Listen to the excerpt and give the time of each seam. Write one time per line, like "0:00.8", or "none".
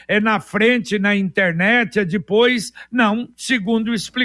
none